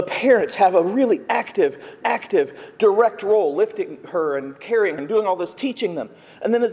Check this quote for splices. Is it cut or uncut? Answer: cut